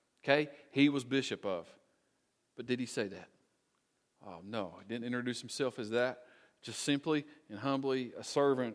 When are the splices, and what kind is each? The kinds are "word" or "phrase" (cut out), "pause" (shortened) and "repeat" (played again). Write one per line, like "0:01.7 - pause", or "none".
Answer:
none